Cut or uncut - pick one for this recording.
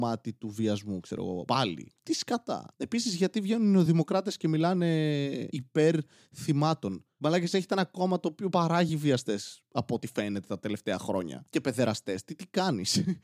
uncut